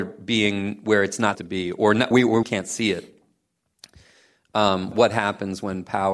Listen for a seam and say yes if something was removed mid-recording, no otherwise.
yes